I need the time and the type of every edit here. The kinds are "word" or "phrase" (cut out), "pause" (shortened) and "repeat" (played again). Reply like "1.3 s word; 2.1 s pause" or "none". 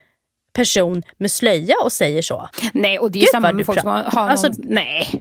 none